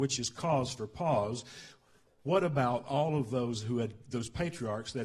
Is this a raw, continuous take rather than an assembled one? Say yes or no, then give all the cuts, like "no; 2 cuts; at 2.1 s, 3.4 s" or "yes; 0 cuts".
yes; 0 cuts